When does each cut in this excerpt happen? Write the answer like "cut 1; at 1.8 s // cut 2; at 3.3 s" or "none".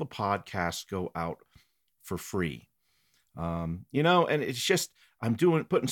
none